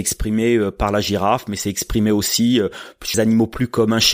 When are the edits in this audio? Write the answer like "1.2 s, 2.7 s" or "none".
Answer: 3.1 s